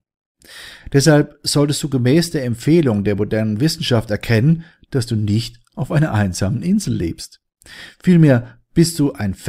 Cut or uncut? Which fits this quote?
uncut